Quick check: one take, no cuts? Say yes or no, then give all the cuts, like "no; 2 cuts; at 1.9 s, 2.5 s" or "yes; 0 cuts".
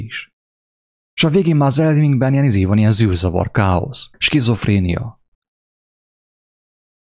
no; 1 cut; at 4.1 s